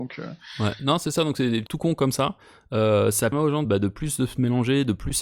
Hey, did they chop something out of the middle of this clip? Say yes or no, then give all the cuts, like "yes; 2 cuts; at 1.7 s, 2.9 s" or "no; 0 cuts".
yes; 3 cuts; at 1.7 s, 3.3 s, 3.6 s